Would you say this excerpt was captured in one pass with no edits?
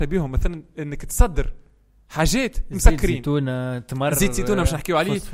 yes; 0 cuts

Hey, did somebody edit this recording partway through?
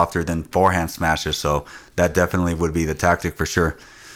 no; 0 cuts

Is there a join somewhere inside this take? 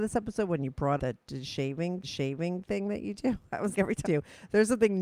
yes; 4 cuts; at 1.0 s, 2.0 s, 3.7 s, 4.1 s

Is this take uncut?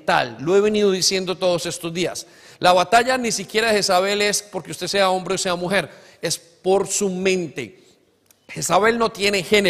yes; 0 cuts

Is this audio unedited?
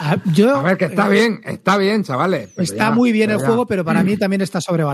yes; 0 cuts

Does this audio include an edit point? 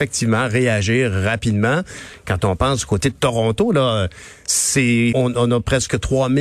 yes; 1 cut; at 5.1 s

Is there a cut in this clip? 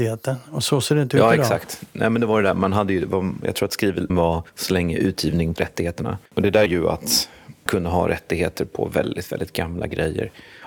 yes; 6 cuts; at 4.1 s, 4.5 s, 5.6 s, 6.3 s, 6.7 s, 7.7 s

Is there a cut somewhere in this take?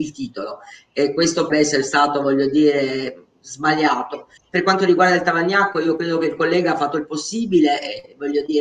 yes; 2 cuts; at 1.5 s, 4.4 s

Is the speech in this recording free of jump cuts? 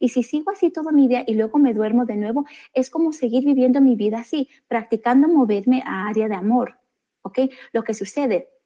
yes; 0 cuts

